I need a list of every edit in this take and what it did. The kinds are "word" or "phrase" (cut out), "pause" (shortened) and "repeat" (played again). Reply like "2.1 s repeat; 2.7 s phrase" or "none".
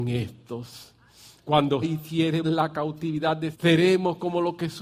1.8 s word; 2.4 s word; 3.5 s word

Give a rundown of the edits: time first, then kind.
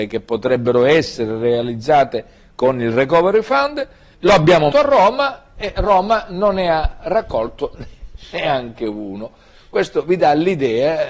4.7 s word

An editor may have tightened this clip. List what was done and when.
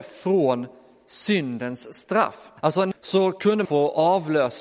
2.6 s pause; 2.9 s phrase; 3.6 s word

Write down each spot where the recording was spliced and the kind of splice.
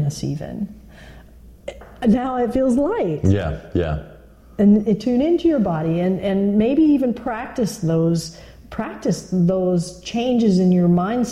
none

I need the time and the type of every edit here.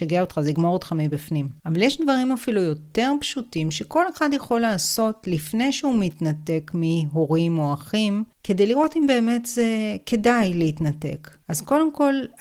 1.6 s pause; 8.3 s pause; 11.4 s pause

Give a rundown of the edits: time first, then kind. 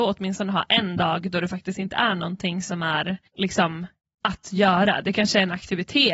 3.3 s pause

